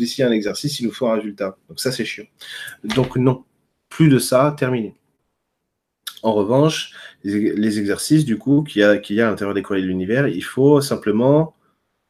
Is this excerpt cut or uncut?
uncut